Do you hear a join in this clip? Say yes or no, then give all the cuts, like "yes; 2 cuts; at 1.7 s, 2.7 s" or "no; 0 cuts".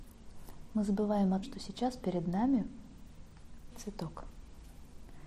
yes; 2 cuts; at 1.4 s, 3.7 s